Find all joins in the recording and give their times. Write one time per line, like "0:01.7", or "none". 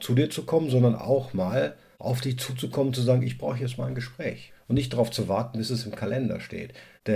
none